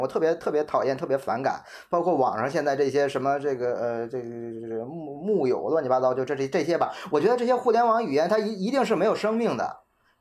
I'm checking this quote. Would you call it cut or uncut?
uncut